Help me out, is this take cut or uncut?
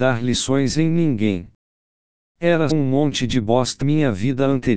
cut